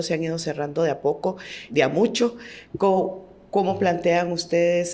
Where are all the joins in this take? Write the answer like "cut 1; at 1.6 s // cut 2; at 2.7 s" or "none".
cut 1; at 1.7 s